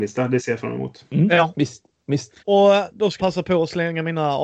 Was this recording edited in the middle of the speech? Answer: yes; 2 cuts; at 2.4 s, 3.2 s

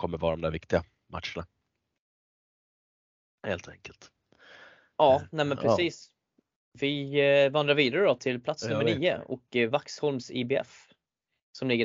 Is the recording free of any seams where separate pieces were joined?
yes; 0 cuts

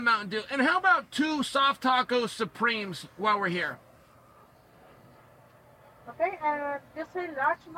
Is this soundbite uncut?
yes; 0 cuts

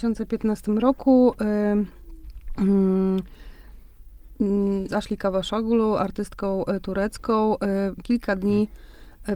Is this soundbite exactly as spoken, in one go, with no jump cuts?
no; 2 cuts; at 4.9 s, 8.0 s

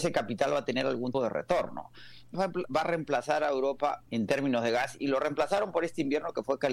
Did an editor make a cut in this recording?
yes; 3 cuts; at 1.1 s, 2.3 s, 4.1 s

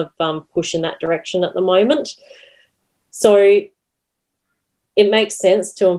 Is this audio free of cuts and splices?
yes; 0 cuts

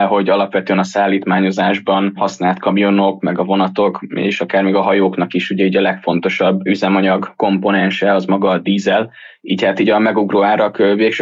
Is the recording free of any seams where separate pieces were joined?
yes; 0 cuts

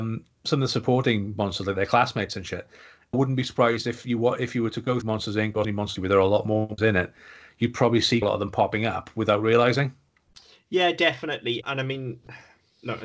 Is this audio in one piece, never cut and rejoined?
no; 7 cuts; at 3.1 s, 5.0 s, 5.6 s, 6.0 s, 6.8 s, 8.2 s, 11.6 s

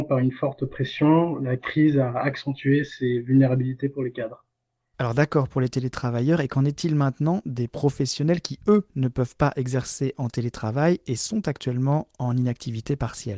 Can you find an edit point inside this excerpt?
no; 0 cuts

